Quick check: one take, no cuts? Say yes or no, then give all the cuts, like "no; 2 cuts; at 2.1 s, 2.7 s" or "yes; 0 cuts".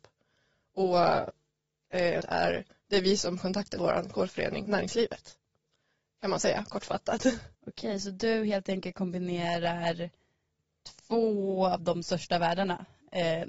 no; 6 cuts; at 2.2 s, 3.4 s, 3.8 s, 4.7 s, 6.4 s, 7.5 s